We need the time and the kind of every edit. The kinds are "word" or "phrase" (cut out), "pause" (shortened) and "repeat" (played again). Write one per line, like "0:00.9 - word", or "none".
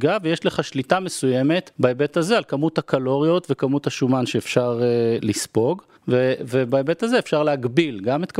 0:01.7 - pause
0:06.0 - pause

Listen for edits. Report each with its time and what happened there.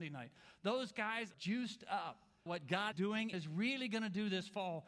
0:01.3 - word
0:02.5 - word
0:02.9 - word
0:03.3 - word

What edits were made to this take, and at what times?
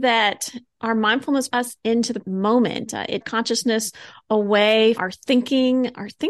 0:01.5 - phrase
0:02.2 - word
0:03.2 - phrase
0:05.0 - word

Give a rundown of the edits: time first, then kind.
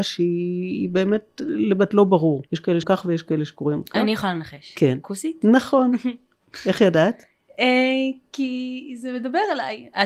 0:01.9 - word
0:02.5 - pause
0:02.8 - word

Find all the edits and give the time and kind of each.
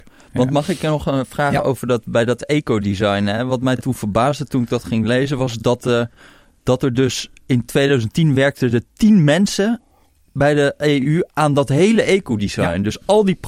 none

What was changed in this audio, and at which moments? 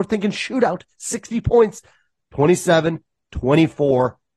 none

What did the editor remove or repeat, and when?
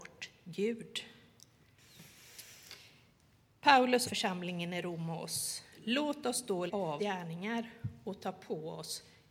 0:04.0 - word
0:06.7 - word
0:07.0 - phrase

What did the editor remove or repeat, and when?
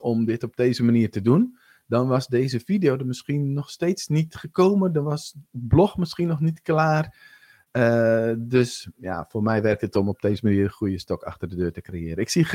none

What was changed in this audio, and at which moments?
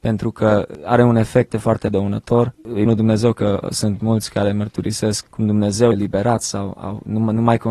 0:01.5 - word
0:02.5 - word
0:02.9 - word
0:04.0 - word
0:05.2 - word
0:05.9 - word

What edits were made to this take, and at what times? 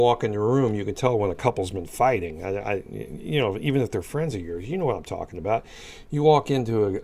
none

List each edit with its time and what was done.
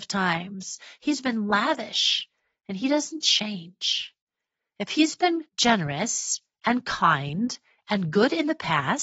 0:05.5 - pause

